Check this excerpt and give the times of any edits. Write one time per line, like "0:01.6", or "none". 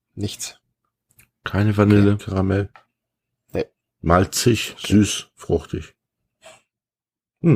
0:02.2